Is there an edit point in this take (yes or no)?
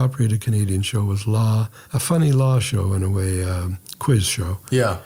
yes